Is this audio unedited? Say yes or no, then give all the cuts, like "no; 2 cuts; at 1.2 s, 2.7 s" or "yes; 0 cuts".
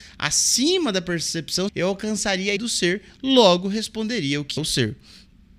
no; 3 cuts; at 1.7 s, 2.6 s, 4.6 s